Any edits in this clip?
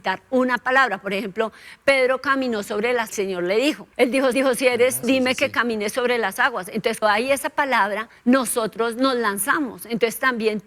yes; 6 cuts; at 3.1 s, 3.9 s, 4.3 s, 5.0 s, 7.0 s, 8.2 s

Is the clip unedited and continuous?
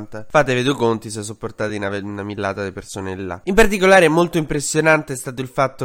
yes; 0 cuts

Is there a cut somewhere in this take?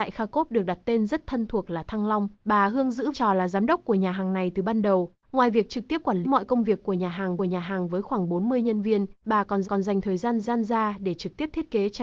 yes; 7 cuts; at 2.3 s, 3.1 s, 5.2 s, 6.2 s, 7.4 s, 9.6 s, 10.4 s

